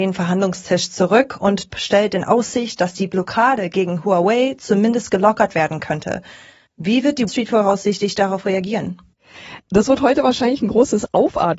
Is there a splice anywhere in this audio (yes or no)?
yes